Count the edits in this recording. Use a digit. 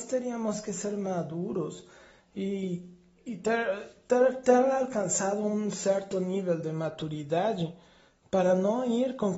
0